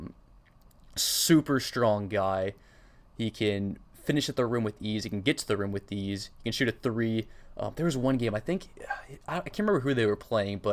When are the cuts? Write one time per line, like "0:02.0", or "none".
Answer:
none